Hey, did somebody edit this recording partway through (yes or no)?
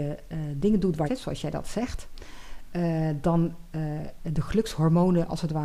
yes